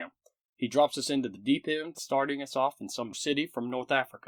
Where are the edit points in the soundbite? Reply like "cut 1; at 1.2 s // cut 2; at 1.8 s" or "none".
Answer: cut 1; at 1.9 s // cut 2; at 3.1 s